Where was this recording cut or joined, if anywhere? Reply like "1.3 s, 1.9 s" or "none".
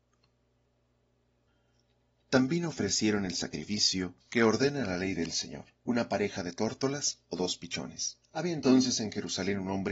4.2 s, 5.8 s, 8.2 s